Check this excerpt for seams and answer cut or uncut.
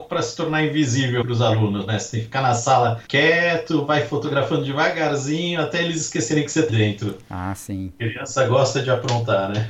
cut